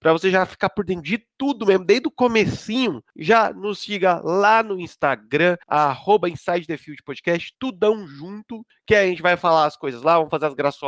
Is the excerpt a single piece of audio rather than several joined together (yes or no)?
no